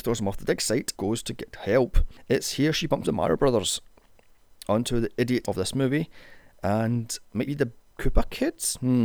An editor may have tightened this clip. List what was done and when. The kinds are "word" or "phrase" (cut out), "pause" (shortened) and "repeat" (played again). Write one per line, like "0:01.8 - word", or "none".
0:00.9 - word
0:03.0 - word
0:05.4 - word
0:07.5 - word